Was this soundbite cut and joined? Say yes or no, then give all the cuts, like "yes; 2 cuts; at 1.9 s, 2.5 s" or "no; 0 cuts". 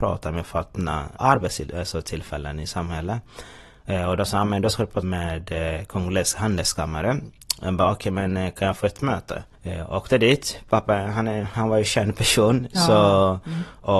yes; 2 cuts; at 1.2 s, 5.0 s